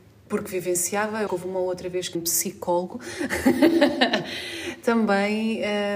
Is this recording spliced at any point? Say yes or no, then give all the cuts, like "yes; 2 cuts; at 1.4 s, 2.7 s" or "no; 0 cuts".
yes; 2 cuts; at 1.3 s, 2.1 s